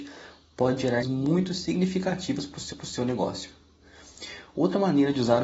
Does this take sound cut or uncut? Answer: cut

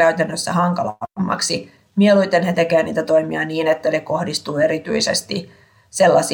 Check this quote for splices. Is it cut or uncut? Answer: uncut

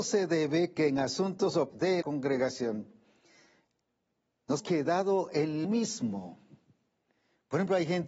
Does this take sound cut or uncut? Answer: cut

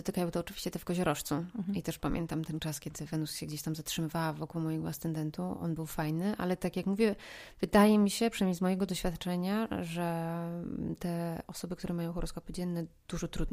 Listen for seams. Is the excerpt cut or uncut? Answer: uncut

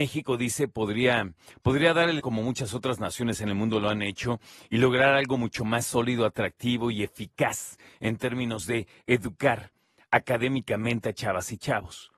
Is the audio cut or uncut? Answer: cut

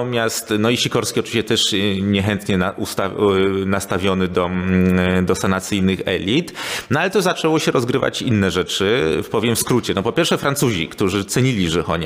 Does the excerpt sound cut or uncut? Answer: uncut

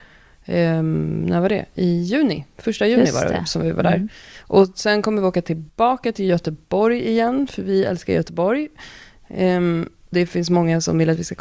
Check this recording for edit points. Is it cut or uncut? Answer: cut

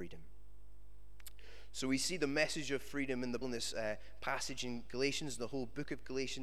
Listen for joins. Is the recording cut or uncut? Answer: cut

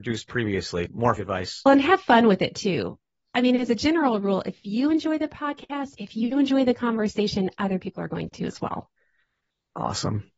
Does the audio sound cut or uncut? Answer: cut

